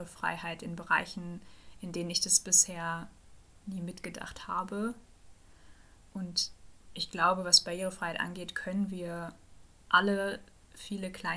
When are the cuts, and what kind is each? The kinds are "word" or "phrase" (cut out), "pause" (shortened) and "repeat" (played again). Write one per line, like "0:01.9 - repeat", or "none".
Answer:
none

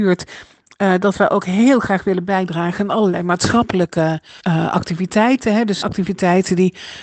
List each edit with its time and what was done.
0:04.4 - pause
0:05.8 - word

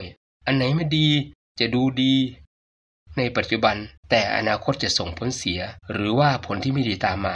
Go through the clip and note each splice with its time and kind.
0:04.0 - pause
0:05.8 - pause

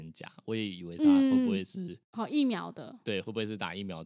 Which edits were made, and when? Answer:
none

